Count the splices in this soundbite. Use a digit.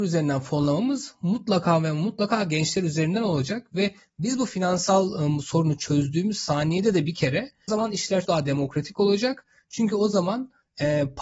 2